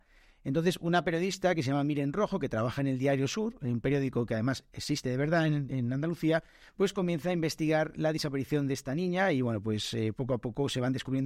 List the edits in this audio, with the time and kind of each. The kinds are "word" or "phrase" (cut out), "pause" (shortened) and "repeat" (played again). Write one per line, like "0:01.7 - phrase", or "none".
none